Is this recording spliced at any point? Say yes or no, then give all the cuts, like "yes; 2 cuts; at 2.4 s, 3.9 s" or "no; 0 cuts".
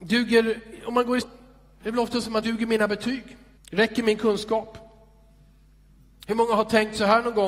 yes; 3 cuts; at 1.2 s, 2.4 s, 3.6 s